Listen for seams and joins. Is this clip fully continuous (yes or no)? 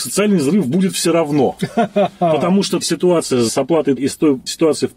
no